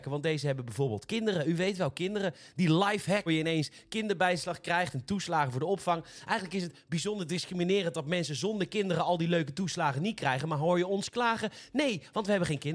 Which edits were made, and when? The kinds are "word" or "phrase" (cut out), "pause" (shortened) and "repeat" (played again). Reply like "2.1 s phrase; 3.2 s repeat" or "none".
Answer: 3.3 s word